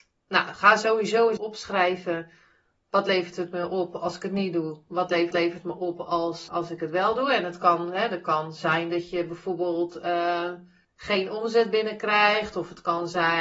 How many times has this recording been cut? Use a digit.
4